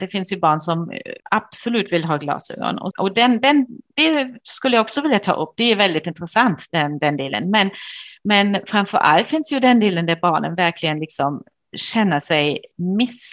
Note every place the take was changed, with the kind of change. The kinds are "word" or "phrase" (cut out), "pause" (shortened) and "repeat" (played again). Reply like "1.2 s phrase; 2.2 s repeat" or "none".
1.2 s pause; 2.9 s word